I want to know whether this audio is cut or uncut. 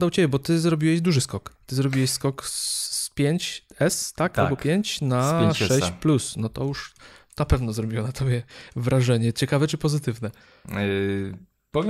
cut